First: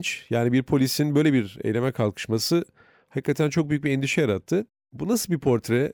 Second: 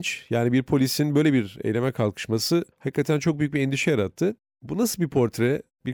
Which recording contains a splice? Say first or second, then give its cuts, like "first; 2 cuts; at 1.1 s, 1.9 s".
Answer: second; 1 cut; at 2.7 s